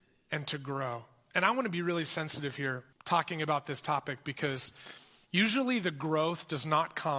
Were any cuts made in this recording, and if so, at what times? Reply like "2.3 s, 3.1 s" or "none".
2.9 s

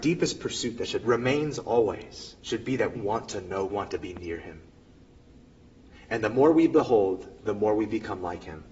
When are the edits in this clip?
1.0 s, 2.4 s, 2.9 s, 3.7 s

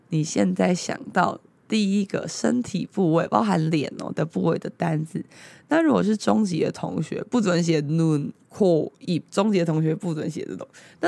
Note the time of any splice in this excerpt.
none

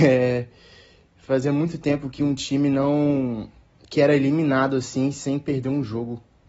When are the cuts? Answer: 3.7 s

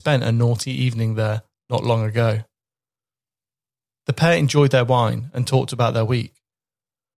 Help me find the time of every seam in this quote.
none

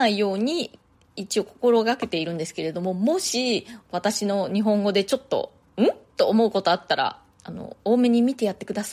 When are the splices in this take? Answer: 3.8 s

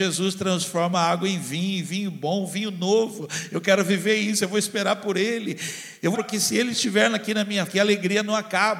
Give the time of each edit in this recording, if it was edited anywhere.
6.1 s, 7.7 s

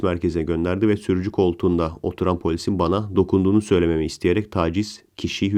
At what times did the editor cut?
none

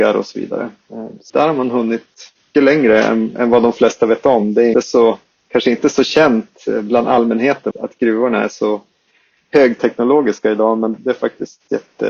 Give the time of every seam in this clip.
1.3 s, 2.5 s, 4.7 s, 7.7 s, 10.9 s

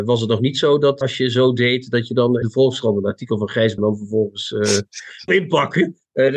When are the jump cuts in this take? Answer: 1.0 s, 2.4 s, 3.8 s, 5.3 s

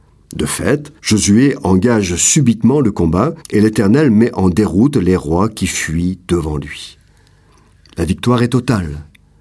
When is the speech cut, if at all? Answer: 1.0 s, 3.4 s

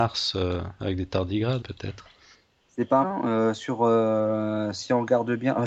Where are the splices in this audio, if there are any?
1.6 s, 2.3 s, 3.0 s

